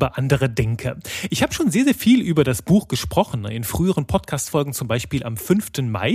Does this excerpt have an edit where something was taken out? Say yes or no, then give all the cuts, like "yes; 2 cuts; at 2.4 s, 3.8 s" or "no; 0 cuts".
no; 0 cuts